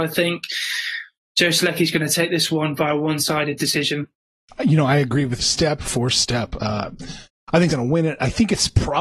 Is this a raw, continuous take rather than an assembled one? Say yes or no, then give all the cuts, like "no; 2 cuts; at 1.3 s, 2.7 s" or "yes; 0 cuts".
no; 2 cuts; at 5.4 s, 7.7 s